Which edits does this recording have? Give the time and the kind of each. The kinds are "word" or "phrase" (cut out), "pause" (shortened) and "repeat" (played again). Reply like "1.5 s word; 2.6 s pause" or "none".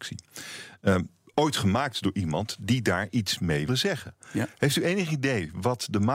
1.3 s pause; 3.7 s word